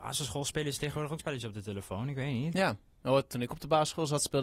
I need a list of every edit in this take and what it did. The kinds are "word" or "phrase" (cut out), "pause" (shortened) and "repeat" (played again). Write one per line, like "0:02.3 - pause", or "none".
0:01.2 - word